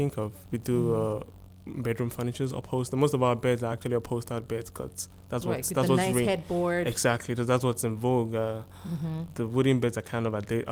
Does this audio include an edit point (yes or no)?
no